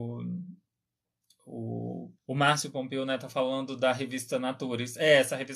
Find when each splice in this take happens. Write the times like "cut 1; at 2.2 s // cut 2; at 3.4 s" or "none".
cut 1; at 2.2 s